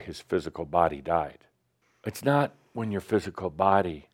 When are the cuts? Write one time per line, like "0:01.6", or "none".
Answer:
0:01.8

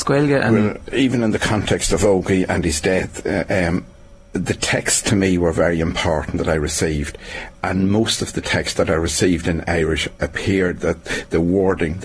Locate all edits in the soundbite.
none

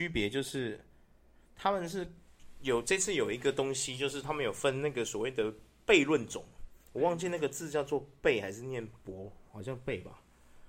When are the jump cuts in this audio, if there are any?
0:06.8

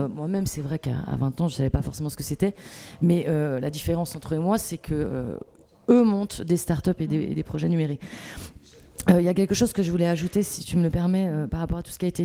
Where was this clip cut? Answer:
none

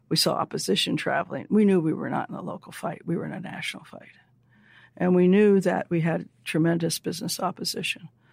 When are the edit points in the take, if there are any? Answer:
none

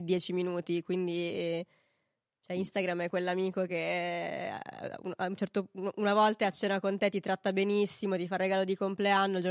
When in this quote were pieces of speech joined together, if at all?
none

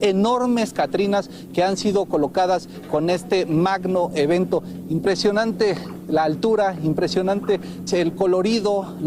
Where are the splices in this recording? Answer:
0:07.9

